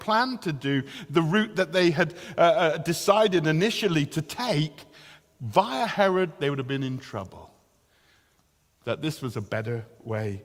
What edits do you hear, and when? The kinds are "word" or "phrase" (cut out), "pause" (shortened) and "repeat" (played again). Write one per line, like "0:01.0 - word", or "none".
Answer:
none